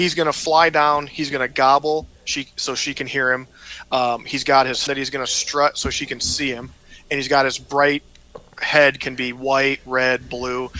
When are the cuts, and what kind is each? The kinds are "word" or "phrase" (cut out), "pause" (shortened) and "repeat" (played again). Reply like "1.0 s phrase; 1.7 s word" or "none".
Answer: 2.2 s pause; 4.9 s word